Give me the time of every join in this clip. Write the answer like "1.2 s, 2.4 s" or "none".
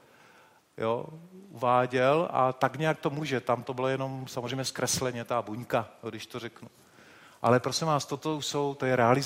none